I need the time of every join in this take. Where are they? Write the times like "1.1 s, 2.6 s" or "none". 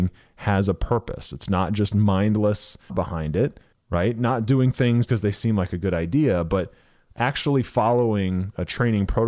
2.9 s, 3.7 s, 5.1 s